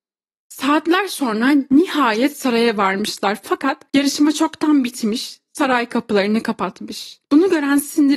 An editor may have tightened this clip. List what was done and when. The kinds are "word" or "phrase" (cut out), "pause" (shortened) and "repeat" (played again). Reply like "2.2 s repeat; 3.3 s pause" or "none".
3.9 s pause; 7.2 s pause